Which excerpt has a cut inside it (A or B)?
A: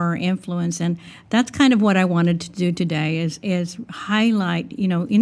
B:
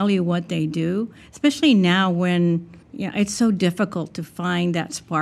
B